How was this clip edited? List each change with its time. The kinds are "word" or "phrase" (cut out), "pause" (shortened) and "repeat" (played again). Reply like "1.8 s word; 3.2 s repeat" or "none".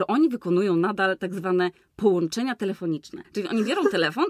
3.2 s pause